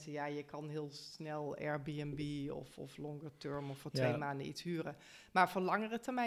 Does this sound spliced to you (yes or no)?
no